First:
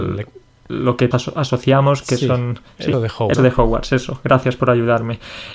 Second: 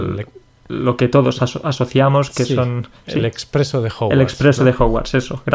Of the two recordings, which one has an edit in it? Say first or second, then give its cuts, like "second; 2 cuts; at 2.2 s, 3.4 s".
first; 3 cuts; at 1.1 s, 2.9 s, 3.3 s